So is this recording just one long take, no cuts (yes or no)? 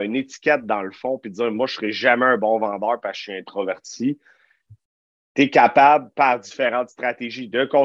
yes